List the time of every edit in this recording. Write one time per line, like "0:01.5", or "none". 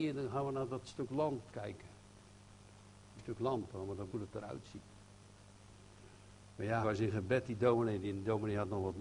0:01.5
0:03.2
0:04.1
0:06.8